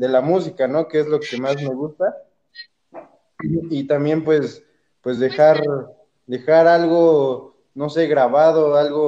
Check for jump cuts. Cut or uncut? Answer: uncut